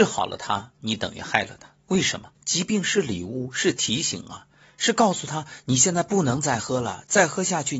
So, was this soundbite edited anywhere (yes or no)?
yes